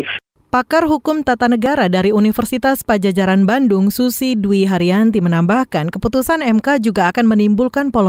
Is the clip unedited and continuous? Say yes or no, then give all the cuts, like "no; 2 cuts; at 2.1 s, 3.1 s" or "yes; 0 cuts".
yes; 0 cuts